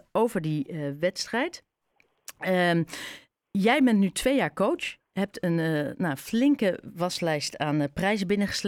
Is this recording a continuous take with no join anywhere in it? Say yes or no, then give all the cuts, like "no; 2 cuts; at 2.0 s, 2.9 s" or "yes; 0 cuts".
yes; 0 cuts